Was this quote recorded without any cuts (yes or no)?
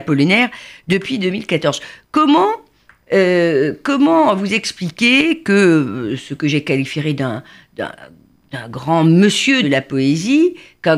no